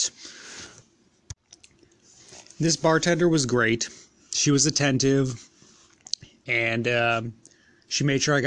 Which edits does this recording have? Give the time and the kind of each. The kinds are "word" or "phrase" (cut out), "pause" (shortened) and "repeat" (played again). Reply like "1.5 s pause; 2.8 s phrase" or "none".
none